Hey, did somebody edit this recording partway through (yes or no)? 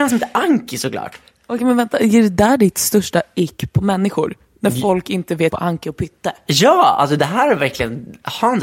yes